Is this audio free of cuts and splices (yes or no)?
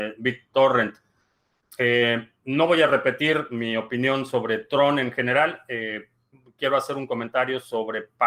yes